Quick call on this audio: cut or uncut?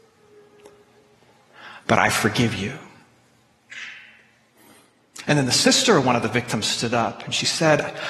uncut